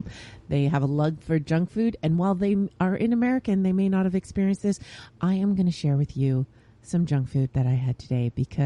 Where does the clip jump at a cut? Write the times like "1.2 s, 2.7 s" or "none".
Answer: none